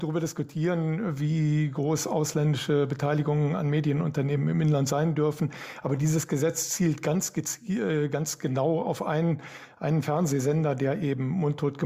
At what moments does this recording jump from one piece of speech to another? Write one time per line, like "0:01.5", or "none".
none